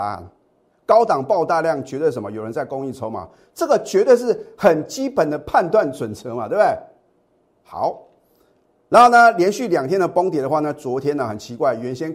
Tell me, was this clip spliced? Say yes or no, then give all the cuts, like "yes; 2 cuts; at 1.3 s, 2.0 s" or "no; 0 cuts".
no; 0 cuts